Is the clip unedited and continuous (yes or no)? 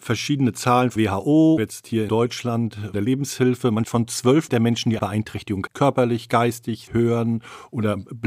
no